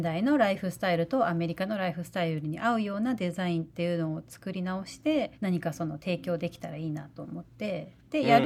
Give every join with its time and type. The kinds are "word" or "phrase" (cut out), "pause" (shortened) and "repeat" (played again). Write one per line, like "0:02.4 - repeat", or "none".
0:05.3 - pause